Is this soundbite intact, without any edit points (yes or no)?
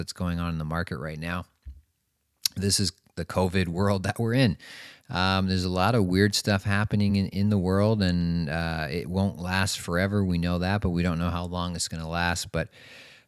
yes